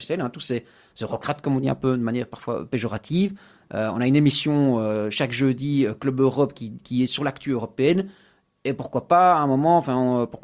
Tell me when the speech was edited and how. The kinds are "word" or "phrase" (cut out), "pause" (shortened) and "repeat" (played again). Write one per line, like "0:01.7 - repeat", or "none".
none